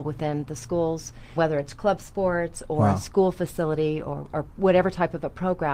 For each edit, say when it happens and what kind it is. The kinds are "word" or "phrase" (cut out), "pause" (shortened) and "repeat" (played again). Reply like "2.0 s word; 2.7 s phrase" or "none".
1.4 s word